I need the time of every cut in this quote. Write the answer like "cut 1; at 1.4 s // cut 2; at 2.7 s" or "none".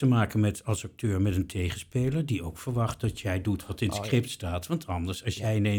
none